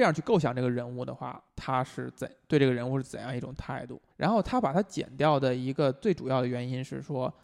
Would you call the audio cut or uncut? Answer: cut